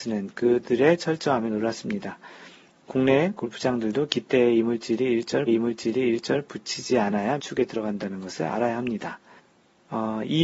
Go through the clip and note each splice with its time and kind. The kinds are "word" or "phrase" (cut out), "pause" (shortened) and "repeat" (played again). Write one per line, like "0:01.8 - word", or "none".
0:05.5 - repeat
0:07.4 - word
0:09.4 - pause